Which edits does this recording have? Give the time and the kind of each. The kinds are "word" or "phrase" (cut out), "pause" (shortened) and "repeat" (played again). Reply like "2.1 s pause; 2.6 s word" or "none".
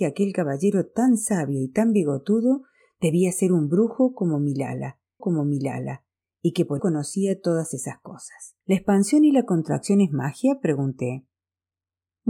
5.2 s repeat; 6.8 s word; 8.6 s pause

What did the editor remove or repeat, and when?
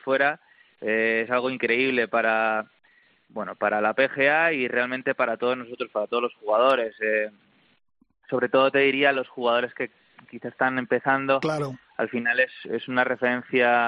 none

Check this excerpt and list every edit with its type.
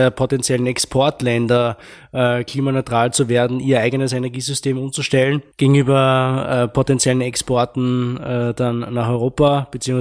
5.5 s pause

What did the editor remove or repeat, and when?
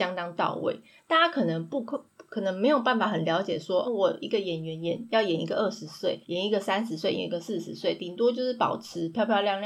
3.8 s word; 6.2 s pause

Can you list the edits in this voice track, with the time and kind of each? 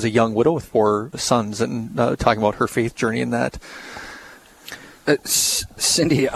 1.1 s word

